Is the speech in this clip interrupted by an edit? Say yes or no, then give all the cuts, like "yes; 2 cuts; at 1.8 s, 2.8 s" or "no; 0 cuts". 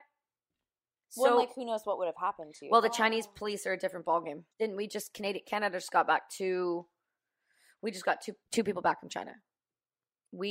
yes; 2 cuts; at 4.5 s, 8.4 s